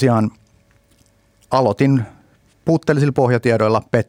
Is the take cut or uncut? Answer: uncut